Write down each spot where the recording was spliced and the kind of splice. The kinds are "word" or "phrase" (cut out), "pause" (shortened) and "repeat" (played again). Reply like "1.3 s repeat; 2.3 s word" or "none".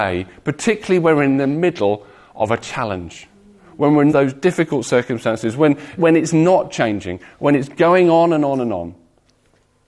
4.1 s phrase; 6.0 s word